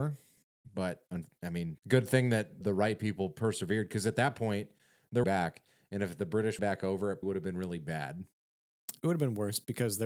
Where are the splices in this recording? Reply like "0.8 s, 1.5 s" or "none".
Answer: 1.8 s, 2.6 s, 5.2 s, 6.6 s, 7.2 s